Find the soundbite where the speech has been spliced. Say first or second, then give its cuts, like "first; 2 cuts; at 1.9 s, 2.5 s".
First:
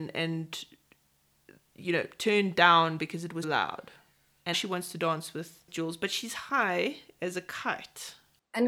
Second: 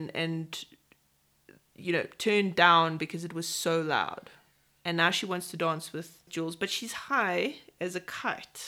first; 2 cuts; at 3.4 s, 4.5 s